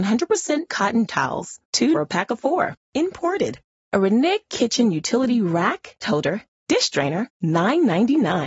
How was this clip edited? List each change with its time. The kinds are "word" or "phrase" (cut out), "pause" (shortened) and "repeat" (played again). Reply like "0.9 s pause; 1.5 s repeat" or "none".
1.1 s word; 1.9 s phrase; 6.0 s word; 7.3 s pause